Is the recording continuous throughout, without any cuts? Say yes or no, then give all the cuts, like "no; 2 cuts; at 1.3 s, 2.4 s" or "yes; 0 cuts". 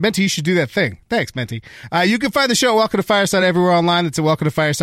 yes; 0 cuts